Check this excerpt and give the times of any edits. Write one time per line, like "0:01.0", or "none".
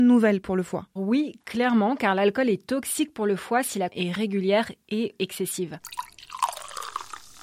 0:01.0
0:03.9
0:05.2